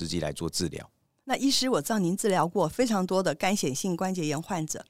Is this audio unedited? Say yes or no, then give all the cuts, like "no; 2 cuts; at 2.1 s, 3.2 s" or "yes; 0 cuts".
yes; 0 cuts